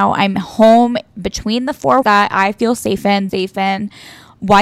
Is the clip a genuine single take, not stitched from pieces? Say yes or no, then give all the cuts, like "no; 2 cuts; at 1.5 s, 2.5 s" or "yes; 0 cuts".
no; 2 cuts; at 2.0 s, 3.3 s